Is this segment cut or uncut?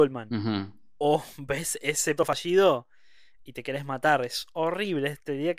cut